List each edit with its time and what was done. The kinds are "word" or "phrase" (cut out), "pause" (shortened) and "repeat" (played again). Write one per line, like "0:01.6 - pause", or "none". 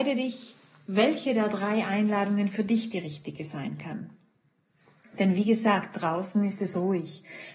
none